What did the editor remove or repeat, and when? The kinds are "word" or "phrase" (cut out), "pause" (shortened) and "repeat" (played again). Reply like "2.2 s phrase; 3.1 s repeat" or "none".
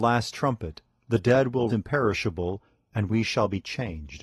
1.7 s word